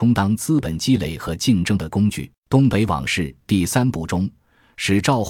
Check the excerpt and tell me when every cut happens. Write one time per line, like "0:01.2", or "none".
0:02.4